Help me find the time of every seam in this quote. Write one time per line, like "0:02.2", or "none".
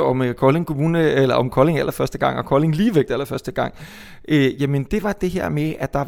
none